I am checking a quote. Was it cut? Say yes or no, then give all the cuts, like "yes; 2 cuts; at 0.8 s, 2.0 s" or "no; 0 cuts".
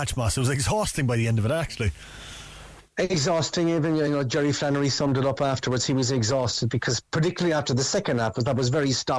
no; 0 cuts